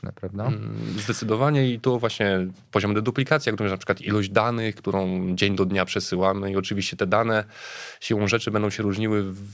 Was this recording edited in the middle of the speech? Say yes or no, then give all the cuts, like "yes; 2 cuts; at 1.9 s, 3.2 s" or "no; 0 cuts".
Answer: no; 0 cuts